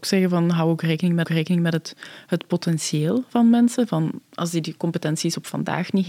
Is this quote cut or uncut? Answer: cut